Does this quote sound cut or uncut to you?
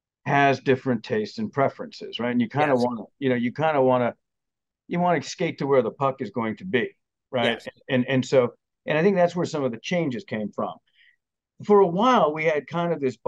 uncut